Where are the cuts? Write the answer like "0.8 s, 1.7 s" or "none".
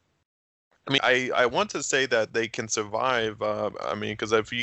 1.0 s